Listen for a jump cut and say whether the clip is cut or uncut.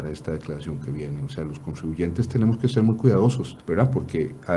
cut